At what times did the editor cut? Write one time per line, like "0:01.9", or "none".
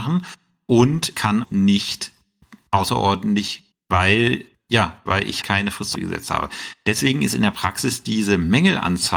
0:01.1
0:01.4
0:03.7
0:04.5
0:05.4
0:05.9